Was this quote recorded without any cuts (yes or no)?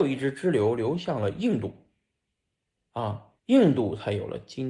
no